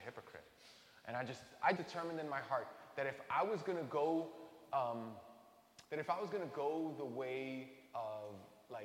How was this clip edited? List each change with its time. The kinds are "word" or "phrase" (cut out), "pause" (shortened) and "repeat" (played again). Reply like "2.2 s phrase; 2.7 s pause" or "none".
1.8 s word; 5.8 s pause; 7.9 s pause